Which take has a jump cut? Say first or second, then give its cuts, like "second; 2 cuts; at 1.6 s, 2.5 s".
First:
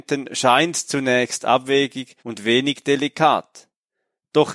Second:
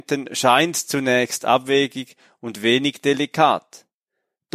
first; 1 cut; at 2.2 s